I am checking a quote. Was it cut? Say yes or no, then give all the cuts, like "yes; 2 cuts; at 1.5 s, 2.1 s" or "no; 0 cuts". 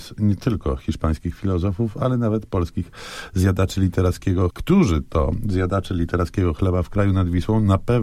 yes; 1 cut; at 4.5 s